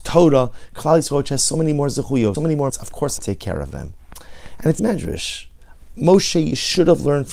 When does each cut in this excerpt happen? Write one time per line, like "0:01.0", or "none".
0:02.3
0:02.7
0:03.2
0:04.8